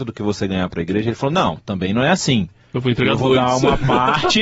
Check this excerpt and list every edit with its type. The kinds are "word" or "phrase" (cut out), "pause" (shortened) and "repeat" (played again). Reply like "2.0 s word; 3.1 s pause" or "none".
none

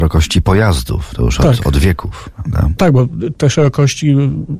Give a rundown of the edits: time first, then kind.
none

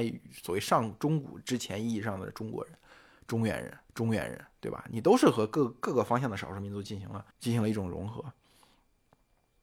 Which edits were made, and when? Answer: 3.9 s repeat; 7.3 s pause

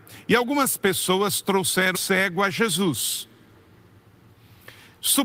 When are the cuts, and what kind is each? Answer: 1.9 s word

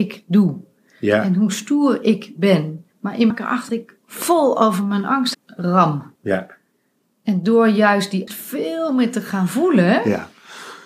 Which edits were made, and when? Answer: 2.9 s pause; 3.3 s phrase; 3.7 s word; 5.3 s word; 6.2 s pause; 8.3 s word

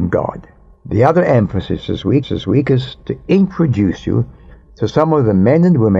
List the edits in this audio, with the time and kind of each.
2.2 s repeat

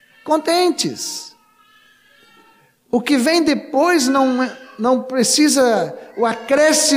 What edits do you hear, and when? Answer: none

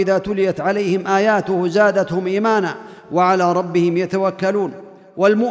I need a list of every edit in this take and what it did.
none

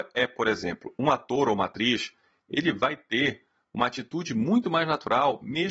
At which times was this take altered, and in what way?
none

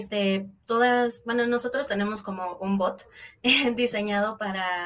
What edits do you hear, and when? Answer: none

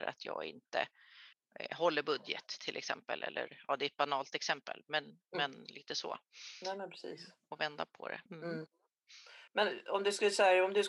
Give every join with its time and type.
1.3 s pause; 8.3 s pause; 9.5 s pause

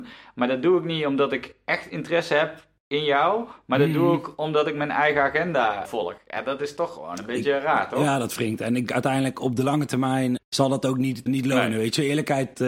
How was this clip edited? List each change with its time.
5.8 s word; 8.9 s word; 10.4 s word; 11.3 s word

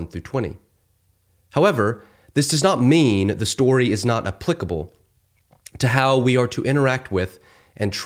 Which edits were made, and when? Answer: none

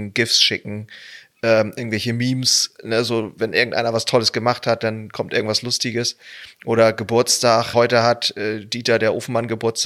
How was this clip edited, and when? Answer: 7.7 s word

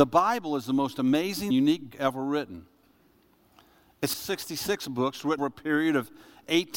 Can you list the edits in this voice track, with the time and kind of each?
1.5 s word; 1.9 s word; 4.1 s word; 5.4 s word

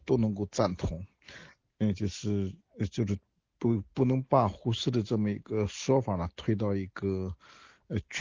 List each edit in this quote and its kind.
none

